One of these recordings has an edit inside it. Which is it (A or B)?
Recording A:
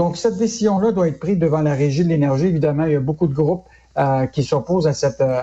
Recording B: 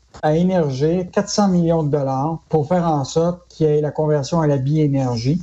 B